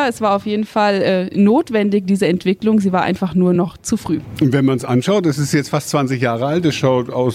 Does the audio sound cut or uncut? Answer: uncut